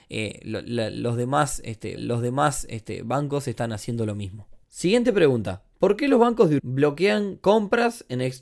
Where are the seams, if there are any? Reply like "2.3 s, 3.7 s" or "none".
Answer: 2.0 s, 4.6 s, 6.6 s